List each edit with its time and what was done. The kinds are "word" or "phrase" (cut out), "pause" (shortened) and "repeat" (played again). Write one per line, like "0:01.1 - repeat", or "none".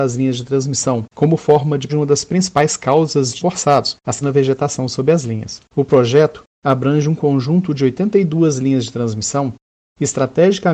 0:01.9 - word
0:03.4 - word
0:04.2 - word
0:06.5 - pause